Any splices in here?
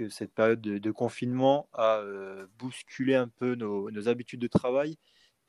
no; 0 cuts

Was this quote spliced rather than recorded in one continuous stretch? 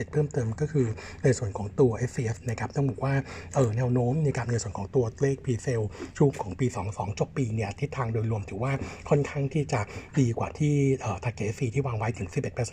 yes; 1 cut; at 2.4 s

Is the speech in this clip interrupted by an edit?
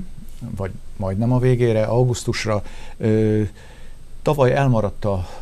no; 0 cuts

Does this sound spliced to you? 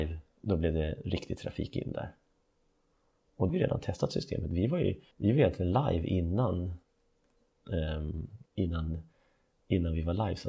yes; 3 cuts; at 3.5 s, 5.1 s, 8.5 s

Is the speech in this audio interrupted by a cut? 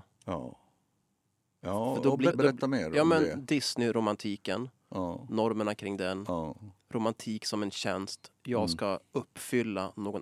yes; 1 cut; at 2.3 s

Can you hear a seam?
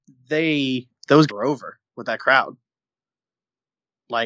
yes; 2 cuts; at 1.3 s, 1.9 s

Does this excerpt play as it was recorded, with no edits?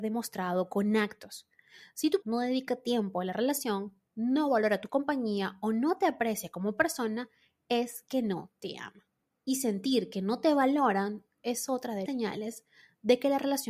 no; 2 cuts; at 2.2 s, 12.1 s

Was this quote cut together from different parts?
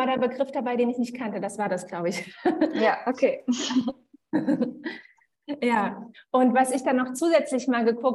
no; 0 cuts

